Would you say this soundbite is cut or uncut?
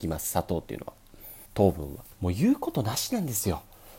cut